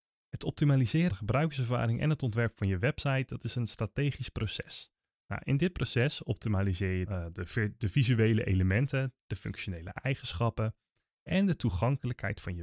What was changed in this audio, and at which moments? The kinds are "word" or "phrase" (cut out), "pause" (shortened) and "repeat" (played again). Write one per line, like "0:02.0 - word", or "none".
0:01.1 - word
0:07.1 - word